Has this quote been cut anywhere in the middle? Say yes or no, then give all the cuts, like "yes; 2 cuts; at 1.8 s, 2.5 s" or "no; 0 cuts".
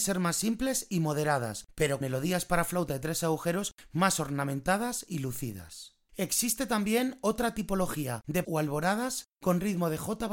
yes; 2 cuts; at 2.0 s, 8.4 s